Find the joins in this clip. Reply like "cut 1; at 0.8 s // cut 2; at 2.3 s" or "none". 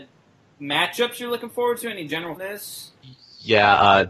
cut 1; at 2.4 s

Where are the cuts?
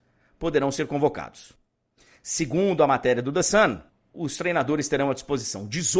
cut 1; at 3.9 s

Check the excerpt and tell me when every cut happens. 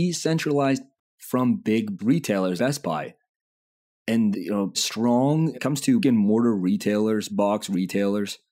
cut 1; at 1.0 s // cut 2; at 2.0 s // cut 3; at 2.6 s // cut 4; at 4.3 s // cut 5; at 4.7 s // cut 6; at 5.5 s // cut 7; at 6.0 s // cut 8; at 7.3 s

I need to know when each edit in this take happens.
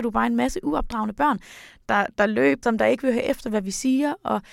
cut 1; at 2.6 s

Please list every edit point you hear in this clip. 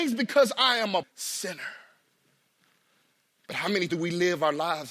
cut 1; at 1.0 s // cut 2; at 3.9 s

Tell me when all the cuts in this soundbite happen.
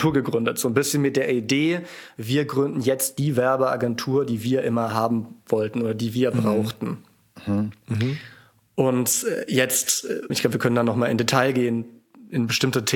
cut 1; at 10.3 s

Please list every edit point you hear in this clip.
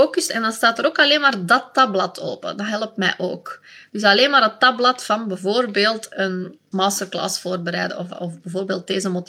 none

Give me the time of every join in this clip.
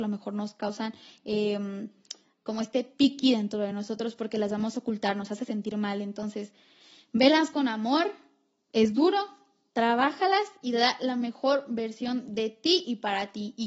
none

